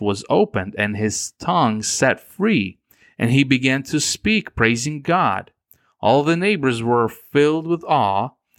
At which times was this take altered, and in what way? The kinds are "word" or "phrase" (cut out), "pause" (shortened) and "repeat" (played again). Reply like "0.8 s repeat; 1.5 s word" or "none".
none

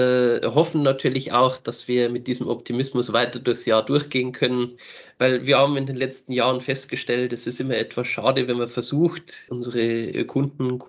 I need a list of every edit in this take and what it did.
none

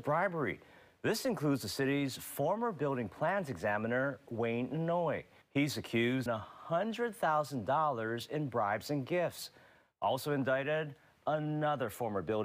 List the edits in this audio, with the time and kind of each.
5.4 s pause; 6.3 s phrase

